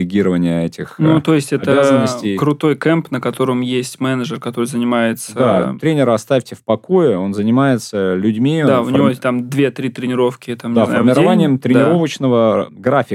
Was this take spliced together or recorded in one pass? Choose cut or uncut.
uncut